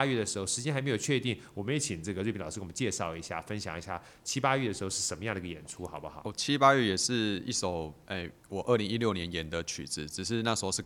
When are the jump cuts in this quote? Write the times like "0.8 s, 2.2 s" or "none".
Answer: 8.4 s